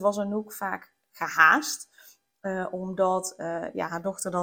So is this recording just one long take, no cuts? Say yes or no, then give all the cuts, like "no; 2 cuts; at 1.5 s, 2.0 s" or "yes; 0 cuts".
yes; 0 cuts